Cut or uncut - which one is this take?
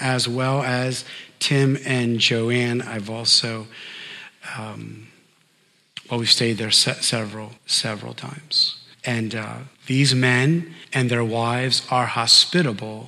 cut